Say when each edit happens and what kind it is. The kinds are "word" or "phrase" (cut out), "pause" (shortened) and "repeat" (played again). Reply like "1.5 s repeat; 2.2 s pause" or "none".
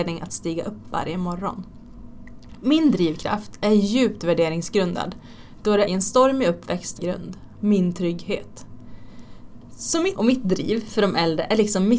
5.9 s word; 7.0 s phrase; 10.2 s word